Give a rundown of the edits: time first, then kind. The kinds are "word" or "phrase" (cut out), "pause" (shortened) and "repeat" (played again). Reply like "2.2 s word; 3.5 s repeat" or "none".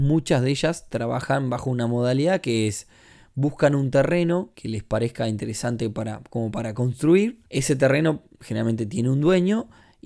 4.5 s word; 7.5 s pause